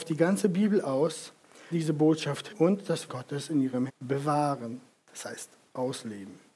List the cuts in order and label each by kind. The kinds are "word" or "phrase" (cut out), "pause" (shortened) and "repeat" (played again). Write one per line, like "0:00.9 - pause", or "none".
0:01.7 - word
0:02.5 - word
0:03.1 - word
0:03.9 - word